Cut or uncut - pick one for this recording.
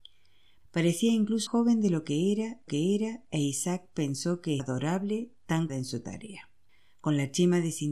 cut